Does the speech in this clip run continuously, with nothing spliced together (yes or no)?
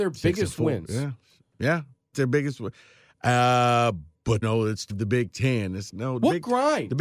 no